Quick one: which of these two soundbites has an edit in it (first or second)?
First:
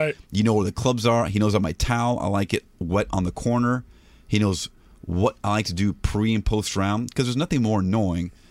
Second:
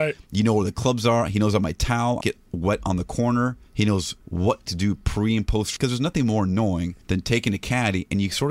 second